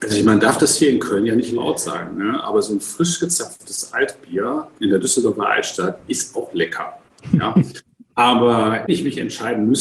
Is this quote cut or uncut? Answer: cut